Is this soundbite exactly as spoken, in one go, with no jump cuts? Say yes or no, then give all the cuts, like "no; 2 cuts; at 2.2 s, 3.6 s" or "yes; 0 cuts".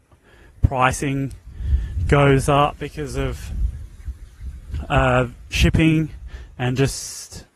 yes; 0 cuts